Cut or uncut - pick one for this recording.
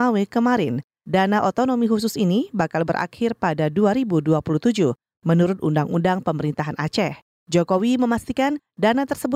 uncut